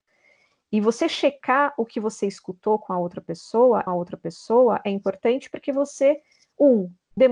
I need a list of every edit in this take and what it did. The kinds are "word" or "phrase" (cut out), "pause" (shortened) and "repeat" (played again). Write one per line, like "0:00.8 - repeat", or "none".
0:03.9 - repeat

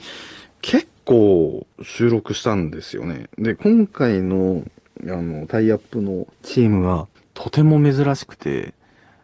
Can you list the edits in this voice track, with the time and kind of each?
0:01.7 - pause
0:06.3 - pause
0:07.2 - pause

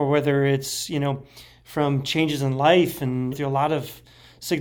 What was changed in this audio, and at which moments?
0:03.3 - phrase

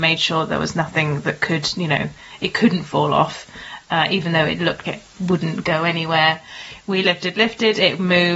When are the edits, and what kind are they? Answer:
0:04.8 - word
0:07.0 - word

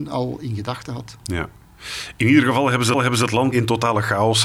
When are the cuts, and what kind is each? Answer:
0:02.9 - repeat
0:03.5 - word

